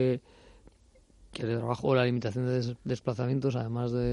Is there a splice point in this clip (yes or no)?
yes